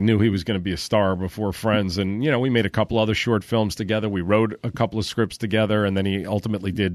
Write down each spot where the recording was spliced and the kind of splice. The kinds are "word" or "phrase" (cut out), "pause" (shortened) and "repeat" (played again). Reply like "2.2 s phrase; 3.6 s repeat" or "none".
none